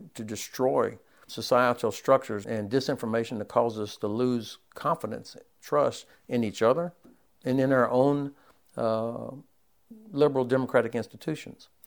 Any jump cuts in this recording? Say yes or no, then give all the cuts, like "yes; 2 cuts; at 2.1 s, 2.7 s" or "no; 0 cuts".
yes; 2 cuts; at 1.3 s, 2.4 s